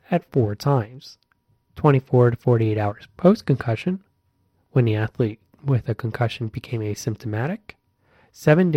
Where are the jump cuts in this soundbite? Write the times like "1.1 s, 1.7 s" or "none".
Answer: none